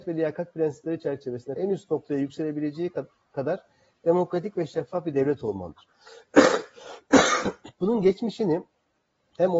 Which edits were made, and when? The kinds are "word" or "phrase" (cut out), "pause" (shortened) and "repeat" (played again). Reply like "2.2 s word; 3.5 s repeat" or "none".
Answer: 1.6 s word